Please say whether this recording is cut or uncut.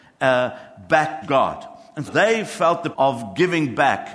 cut